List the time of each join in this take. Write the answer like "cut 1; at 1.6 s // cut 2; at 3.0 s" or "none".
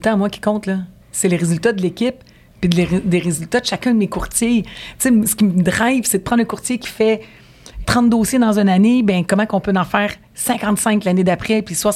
cut 1; at 1.0 s // cut 2; at 7.8 s